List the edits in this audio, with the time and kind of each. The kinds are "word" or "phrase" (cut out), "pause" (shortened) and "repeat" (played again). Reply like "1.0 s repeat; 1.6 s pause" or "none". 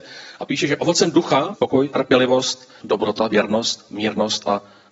1.5 s phrase; 2.8 s word